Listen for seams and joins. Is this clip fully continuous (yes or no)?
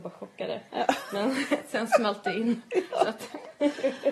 yes